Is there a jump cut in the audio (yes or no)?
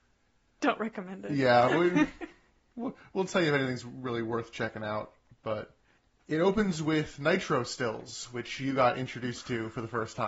no